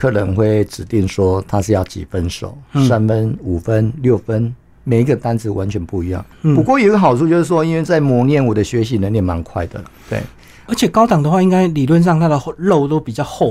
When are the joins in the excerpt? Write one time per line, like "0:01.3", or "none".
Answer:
none